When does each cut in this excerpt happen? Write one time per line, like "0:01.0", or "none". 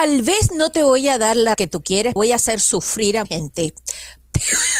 0:01.5
0:02.2
0:03.2